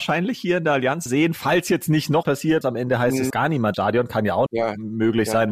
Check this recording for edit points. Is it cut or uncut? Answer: cut